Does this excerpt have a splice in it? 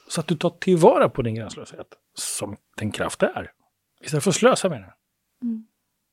no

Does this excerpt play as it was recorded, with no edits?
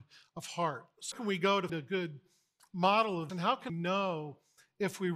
no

